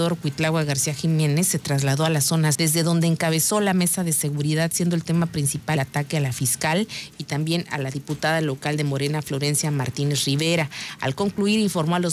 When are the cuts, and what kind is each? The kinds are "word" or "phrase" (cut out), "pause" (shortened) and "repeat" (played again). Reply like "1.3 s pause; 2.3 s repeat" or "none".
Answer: 2.5 s word; 5.8 s word